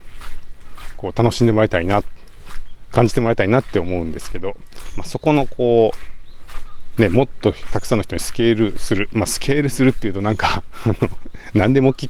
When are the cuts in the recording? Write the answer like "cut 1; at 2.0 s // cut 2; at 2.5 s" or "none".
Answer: none